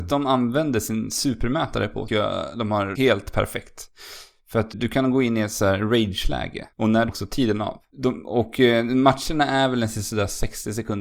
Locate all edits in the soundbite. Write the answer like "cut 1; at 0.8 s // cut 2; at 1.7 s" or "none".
cut 1; at 2.1 s // cut 2; at 2.9 s // cut 3; at 4.7 s // cut 4; at 6.7 s // cut 5; at 7.1 s // cut 6; at 7.9 s

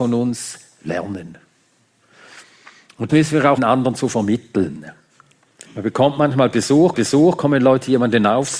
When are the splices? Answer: cut 1; at 3.1 s // cut 2; at 3.6 s // cut 3; at 5.7 s // cut 4; at 6.9 s

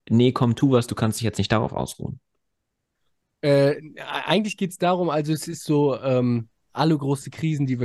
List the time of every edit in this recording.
none

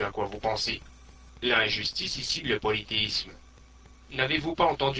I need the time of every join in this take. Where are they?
cut 1; at 2.4 s

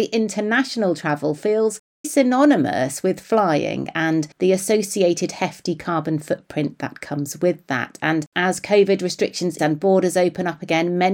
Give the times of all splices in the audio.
cut 1; at 2.0 s // cut 2; at 4.3 s // cut 3; at 9.6 s

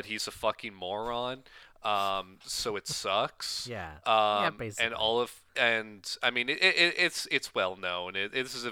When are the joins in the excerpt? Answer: cut 1; at 5.5 s

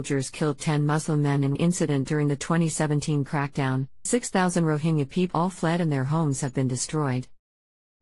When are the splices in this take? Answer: cut 1; at 1.6 s // cut 2; at 4.1 s // cut 3; at 5.3 s

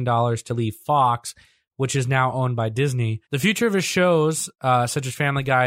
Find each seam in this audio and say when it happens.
none

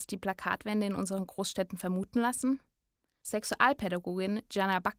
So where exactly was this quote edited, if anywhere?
none

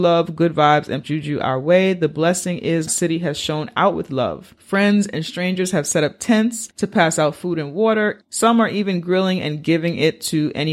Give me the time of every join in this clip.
cut 1; at 1.0 s // cut 2; at 2.9 s // cut 3; at 4.6 s // cut 4; at 6.7 s

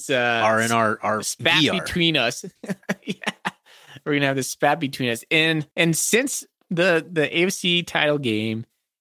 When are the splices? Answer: cut 1; at 5.7 s

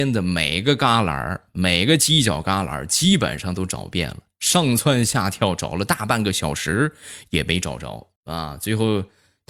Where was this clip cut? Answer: cut 1; at 8.2 s

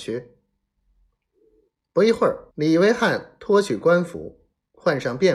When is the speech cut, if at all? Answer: cut 1; at 2.5 s

